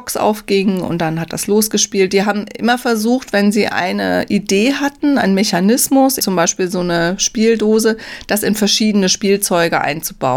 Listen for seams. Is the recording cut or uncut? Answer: cut